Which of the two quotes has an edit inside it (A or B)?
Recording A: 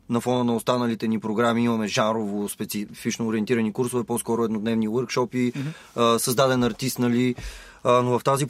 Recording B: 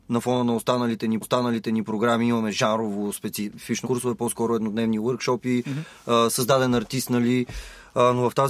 B